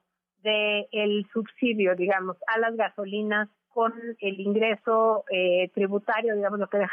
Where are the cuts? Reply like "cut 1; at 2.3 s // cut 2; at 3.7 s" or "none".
none